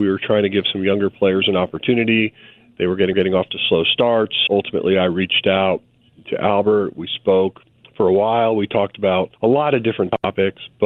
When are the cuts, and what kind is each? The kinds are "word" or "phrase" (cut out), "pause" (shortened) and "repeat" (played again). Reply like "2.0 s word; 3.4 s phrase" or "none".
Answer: 3.1 s repeat; 4.5 s word; 7.7 s pause; 9.4 s pause